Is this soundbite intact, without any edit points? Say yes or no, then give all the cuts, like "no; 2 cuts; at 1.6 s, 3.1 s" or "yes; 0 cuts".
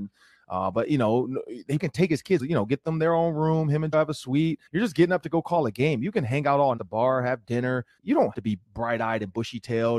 no; 8 cuts; at 1.8 s, 2.4 s, 3.9 s, 4.7 s, 6.8 s, 8.0 s, 8.3 s, 8.6 s